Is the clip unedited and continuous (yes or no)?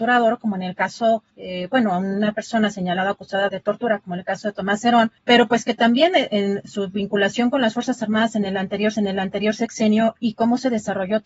no